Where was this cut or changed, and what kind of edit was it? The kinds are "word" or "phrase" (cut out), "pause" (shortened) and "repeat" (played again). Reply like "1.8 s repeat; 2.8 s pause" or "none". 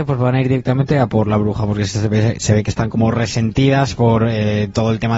none